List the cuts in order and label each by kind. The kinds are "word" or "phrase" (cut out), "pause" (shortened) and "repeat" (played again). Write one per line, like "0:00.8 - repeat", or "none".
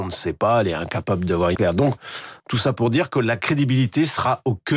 0:01.6 - word
0:02.4 - pause